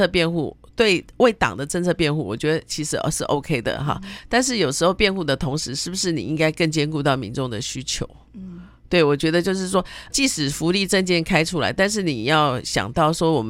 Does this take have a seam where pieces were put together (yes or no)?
yes